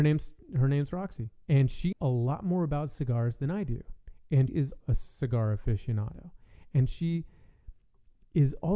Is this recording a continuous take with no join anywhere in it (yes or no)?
no